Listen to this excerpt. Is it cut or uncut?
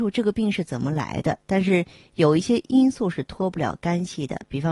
uncut